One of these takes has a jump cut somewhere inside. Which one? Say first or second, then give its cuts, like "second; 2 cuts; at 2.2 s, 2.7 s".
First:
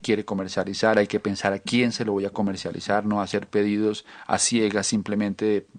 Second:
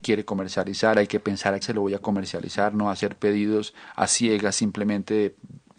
second; 1 cut; at 1.6 s